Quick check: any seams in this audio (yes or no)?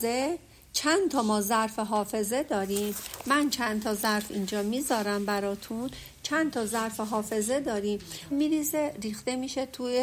yes